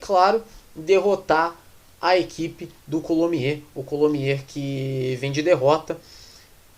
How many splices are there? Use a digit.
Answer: 0